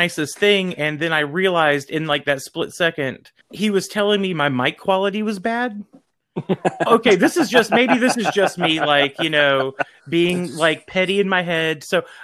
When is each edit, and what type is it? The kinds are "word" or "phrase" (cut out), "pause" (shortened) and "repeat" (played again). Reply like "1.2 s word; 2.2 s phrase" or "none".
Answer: 3.4 s pause; 6.9 s word